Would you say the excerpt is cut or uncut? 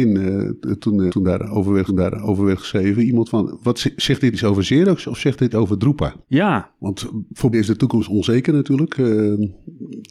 cut